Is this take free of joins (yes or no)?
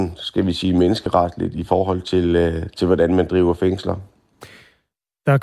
yes